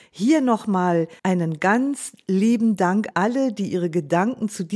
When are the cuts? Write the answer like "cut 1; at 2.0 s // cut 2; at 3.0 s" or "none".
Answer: cut 1; at 1.2 s // cut 2; at 3.1 s